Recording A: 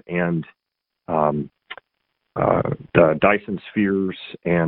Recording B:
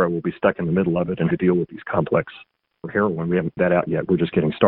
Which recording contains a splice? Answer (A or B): B